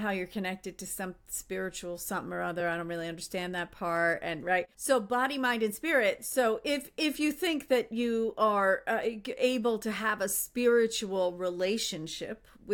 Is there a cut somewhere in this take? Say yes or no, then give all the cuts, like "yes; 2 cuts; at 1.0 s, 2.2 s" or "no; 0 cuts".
no; 0 cuts